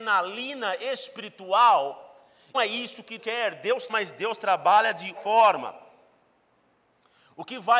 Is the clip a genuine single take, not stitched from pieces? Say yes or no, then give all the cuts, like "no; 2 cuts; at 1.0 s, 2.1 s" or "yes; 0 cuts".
no; 4 cuts; at 2.5 s, 3.2 s, 3.9 s, 5.2 s